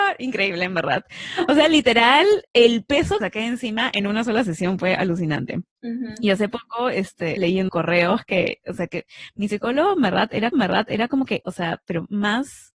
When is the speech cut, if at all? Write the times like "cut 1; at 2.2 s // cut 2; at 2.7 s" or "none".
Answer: cut 1; at 2.4 s // cut 2; at 3.2 s // cut 3; at 5.7 s // cut 4; at 7.4 s // cut 5; at 7.7 s // cut 6; at 10.5 s // cut 7; at 11.4 s